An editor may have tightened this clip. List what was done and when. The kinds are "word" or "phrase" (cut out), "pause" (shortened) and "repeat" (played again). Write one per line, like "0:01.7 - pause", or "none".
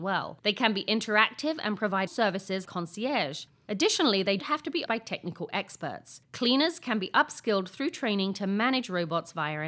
0:02.1 - word
0:02.6 - word
0:04.4 - word
0:04.9 - word